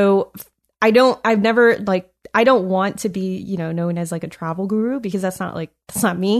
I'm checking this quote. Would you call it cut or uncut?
uncut